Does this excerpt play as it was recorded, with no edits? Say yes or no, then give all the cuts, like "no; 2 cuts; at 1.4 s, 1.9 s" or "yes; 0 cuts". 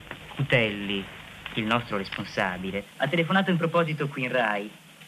no; 1 cut; at 2.9 s